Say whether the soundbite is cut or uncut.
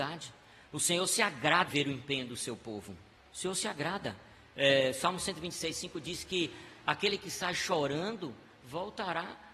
cut